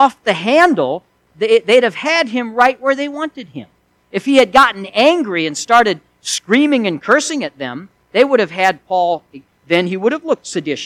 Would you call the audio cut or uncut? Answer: uncut